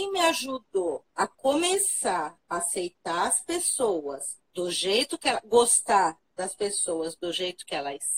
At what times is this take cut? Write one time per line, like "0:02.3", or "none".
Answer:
0:01.1
0:04.5